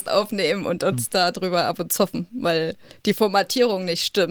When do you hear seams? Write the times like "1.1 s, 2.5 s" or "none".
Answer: 1.9 s